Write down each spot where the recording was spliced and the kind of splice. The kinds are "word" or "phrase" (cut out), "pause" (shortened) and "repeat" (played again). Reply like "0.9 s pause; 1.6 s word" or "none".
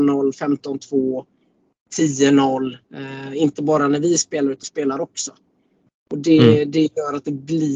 2.9 s pause; 4.6 s phrase